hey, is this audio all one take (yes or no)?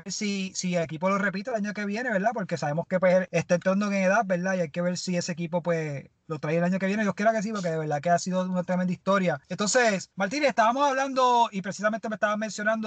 yes